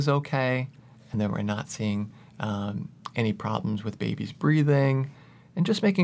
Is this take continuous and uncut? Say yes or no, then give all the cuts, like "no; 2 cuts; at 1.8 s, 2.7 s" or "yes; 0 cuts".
yes; 0 cuts